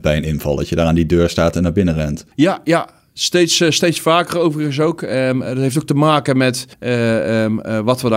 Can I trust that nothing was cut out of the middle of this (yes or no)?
no